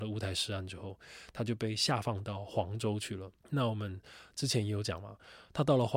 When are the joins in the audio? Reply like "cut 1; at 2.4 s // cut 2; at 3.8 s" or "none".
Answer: cut 1; at 3.4 s